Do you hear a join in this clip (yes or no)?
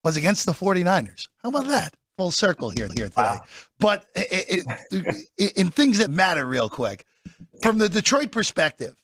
yes